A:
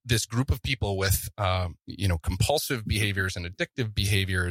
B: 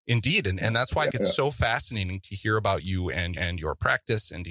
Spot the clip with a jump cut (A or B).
B